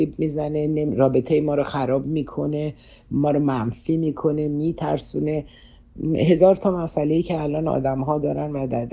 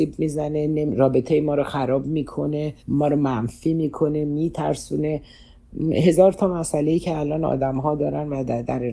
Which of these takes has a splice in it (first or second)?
second